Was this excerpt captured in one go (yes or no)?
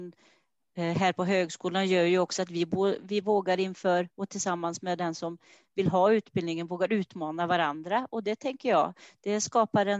yes